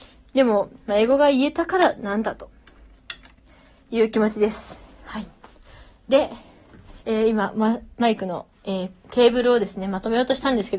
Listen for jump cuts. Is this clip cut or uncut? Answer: cut